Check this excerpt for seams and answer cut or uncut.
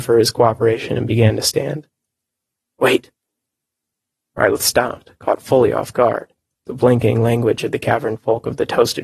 uncut